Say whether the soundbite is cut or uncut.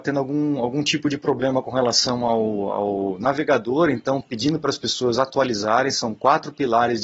uncut